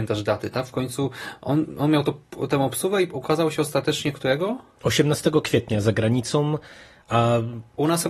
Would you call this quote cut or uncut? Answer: uncut